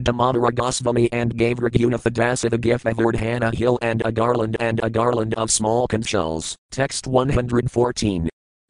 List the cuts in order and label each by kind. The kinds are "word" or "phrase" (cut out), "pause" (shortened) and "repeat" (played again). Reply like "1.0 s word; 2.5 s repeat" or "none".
2.8 s phrase; 4.6 s repeat; 6.6 s pause